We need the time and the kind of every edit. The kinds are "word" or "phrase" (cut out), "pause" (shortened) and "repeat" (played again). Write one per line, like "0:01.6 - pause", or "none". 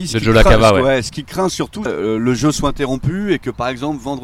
0:01.9 - phrase